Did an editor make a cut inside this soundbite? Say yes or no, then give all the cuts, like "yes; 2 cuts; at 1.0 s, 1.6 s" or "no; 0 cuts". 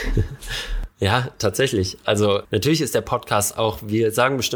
yes; 1 cut; at 2.4 s